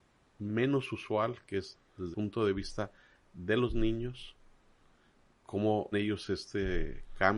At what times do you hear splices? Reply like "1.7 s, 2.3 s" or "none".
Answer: 2.1 s, 5.9 s